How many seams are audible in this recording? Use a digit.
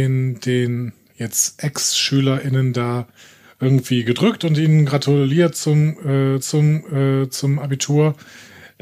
1